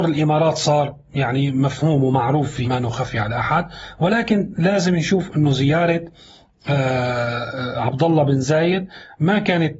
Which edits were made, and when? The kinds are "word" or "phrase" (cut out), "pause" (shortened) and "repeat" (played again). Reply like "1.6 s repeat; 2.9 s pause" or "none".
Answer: 2.6 s word